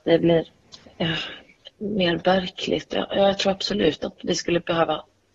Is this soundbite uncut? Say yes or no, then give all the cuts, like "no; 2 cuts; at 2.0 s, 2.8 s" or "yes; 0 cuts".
yes; 0 cuts